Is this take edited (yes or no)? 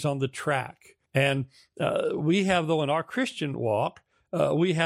yes